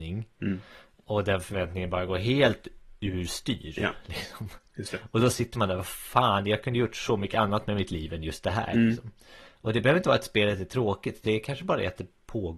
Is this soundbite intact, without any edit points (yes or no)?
yes